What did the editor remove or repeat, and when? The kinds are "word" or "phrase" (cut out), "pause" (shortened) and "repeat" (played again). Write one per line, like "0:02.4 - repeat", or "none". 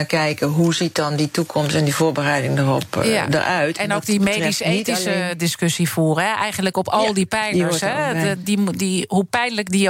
none